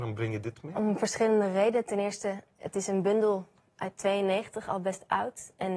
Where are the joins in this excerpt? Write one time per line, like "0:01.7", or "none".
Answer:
none